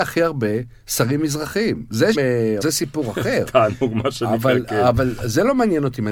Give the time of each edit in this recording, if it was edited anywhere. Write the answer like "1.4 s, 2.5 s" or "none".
2.1 s, 2.6 s

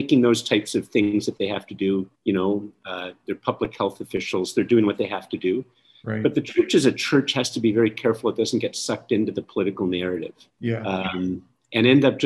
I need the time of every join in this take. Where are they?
2.1 s, 10.5 s

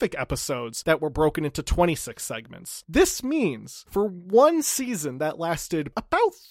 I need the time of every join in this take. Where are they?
none

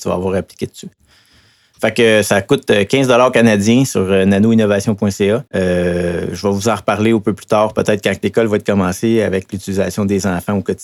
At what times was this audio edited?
5.5 s

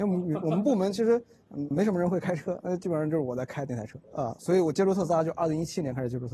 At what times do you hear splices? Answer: 1.7 s, 4.0 s

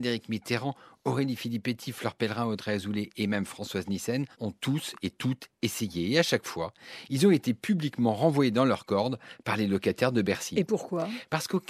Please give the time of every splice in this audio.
4.3 s

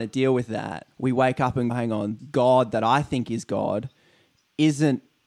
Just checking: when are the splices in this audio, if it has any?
0.9 s, 1.7 s, 2.2 s

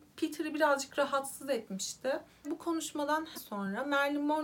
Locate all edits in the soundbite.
2.4 s, 3.3 s

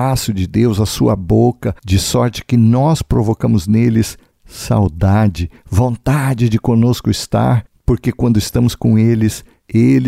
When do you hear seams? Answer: 1.8 s

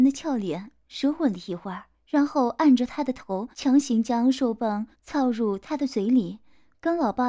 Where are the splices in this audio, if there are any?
1.9 s, 3.5 s, 4.9 s

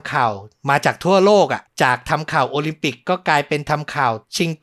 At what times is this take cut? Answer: 1.7 s

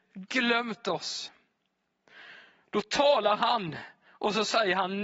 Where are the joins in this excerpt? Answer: none

